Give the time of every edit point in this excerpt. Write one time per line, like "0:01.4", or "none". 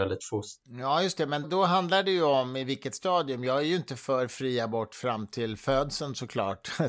0:01.4